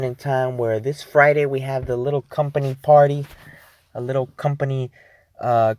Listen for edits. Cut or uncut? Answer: uncut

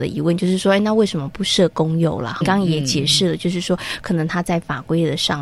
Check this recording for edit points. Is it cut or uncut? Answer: cut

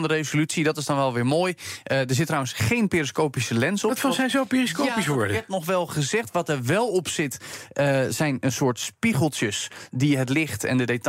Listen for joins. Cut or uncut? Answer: uncut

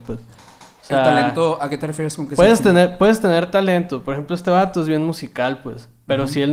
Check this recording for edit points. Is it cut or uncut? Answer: uncut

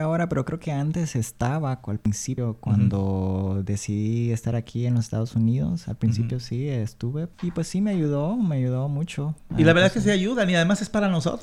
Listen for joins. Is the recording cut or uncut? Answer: cut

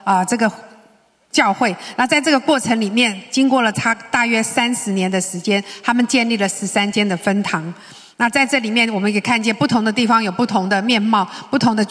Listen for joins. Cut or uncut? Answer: uncut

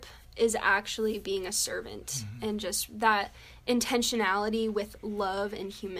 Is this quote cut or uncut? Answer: uncut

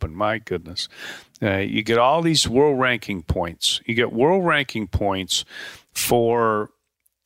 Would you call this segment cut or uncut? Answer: uncut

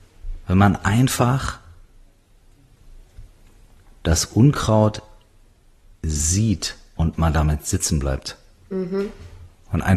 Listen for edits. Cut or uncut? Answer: uncut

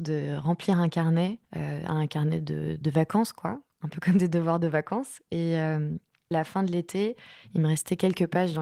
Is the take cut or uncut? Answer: cut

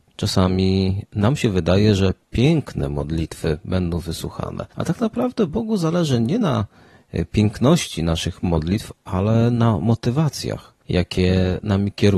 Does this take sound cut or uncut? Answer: cut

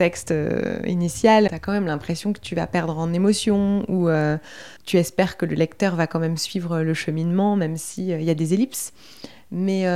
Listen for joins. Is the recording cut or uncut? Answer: cut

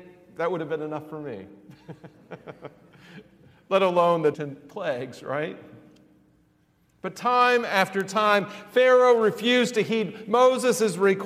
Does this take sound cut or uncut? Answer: cut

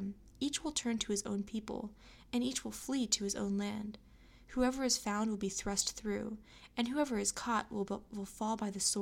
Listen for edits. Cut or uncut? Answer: uncut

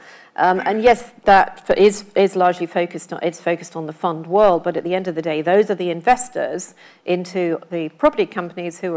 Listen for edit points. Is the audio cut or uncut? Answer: uncut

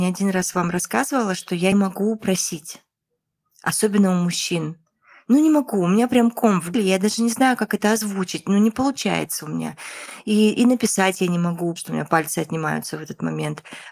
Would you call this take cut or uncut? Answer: cut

